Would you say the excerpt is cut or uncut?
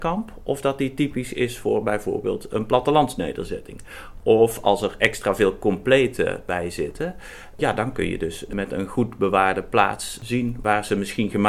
uncut